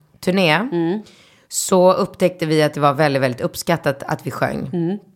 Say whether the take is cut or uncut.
uncut